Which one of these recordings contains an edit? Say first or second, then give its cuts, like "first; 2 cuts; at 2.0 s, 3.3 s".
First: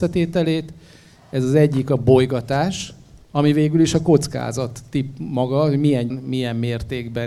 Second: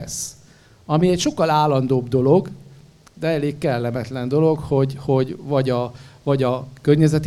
first; 2 cuts; at 3.2 s, 6.1 s